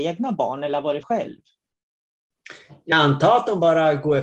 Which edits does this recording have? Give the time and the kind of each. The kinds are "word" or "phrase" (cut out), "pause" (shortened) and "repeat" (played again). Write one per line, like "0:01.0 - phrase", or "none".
0:01.0 - word
0:02.9 - word